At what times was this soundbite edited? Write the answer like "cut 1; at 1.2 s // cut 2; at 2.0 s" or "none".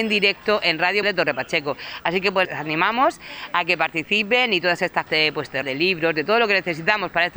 cut 1; at 1.0 s // cut 2; at 2.4 s // cut 3; at 5.1 s // cut 4; at 5.6 s